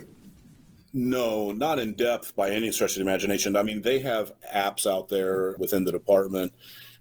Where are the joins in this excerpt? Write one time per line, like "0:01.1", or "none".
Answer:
0:05.6